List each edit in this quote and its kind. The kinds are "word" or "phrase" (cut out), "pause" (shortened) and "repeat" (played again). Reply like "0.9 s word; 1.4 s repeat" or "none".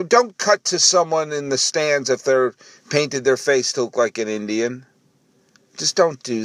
none